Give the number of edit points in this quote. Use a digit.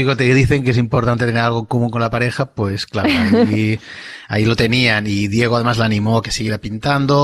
0